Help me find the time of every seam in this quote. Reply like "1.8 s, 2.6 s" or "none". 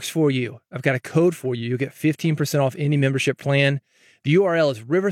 none